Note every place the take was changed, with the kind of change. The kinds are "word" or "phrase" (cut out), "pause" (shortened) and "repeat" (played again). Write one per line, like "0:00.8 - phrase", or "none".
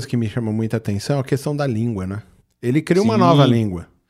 none